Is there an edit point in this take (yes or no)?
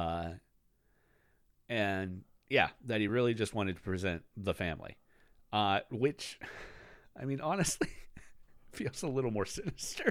no